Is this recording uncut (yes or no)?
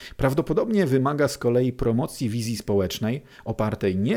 yes